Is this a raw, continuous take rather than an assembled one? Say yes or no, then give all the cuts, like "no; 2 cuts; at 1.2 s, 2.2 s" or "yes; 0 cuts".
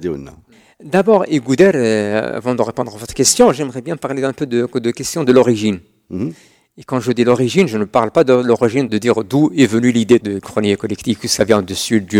yes; 0 cuts